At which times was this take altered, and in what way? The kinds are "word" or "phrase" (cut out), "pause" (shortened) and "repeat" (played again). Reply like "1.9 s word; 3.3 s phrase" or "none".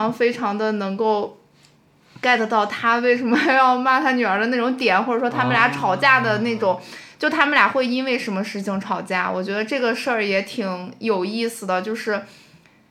none

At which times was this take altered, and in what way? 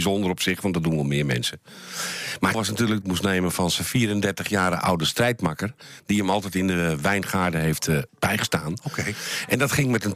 2.5 s word; 3.0 s phrase; 8.1 s pause

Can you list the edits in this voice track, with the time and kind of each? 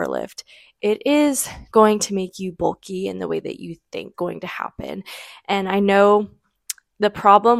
1.7 s word; 4.1 s word

